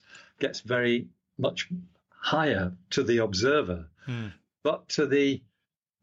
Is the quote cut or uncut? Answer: uncut